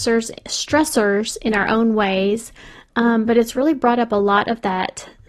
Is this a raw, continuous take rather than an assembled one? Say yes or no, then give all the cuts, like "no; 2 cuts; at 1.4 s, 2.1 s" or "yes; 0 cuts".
yes; 0 cuts